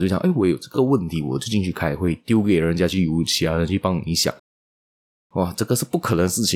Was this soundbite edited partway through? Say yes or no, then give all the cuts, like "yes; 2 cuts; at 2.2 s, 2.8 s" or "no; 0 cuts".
no; 0 cuts